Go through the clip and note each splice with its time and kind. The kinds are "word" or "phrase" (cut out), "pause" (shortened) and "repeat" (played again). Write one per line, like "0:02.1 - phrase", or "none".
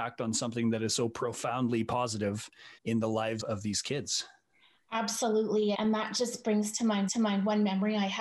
0:02.8 - pause
0:03.4 - word
0:05.7 - word
0:07.1 - repeat